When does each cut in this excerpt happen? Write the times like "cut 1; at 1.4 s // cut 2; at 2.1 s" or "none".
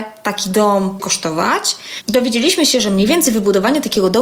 cut 1; at 1.0 s